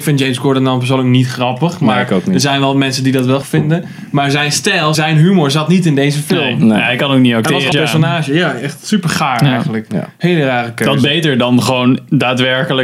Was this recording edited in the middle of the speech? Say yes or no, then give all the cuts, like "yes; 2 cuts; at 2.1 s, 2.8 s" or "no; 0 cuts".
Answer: yes; 3 cuts; at 3.4 s, 4.9 s, 7.7 s